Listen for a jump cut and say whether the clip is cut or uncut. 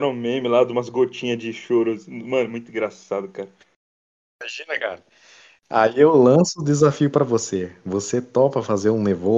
uncut